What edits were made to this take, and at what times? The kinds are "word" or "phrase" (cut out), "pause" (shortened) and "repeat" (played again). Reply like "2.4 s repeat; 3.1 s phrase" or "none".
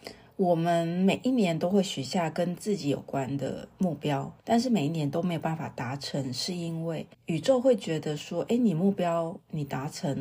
4.4 s pause; 7.1 s pause